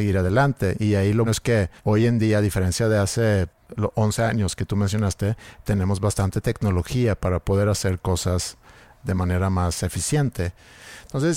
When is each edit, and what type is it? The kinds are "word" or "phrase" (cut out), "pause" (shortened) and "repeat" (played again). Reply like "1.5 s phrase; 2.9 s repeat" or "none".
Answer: 1.3 s word; 1.8 s pause